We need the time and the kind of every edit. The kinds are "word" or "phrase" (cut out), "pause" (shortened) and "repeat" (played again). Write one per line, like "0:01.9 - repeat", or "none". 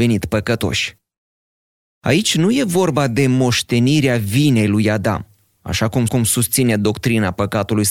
0:06.1 - repeat